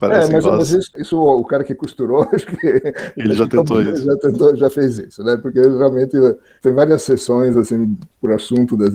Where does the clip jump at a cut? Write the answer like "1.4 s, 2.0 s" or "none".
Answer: none